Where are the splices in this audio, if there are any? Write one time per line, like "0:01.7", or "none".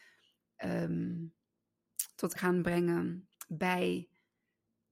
0:02.4